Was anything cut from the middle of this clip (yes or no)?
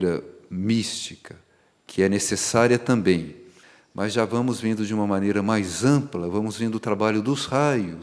no